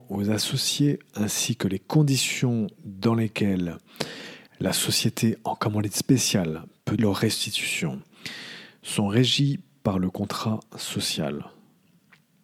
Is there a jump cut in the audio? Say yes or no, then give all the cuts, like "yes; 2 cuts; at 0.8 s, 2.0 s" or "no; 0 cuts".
yes; 2 cuts; at 4.5 s, 7.0 s